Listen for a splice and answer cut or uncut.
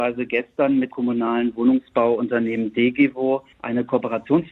cut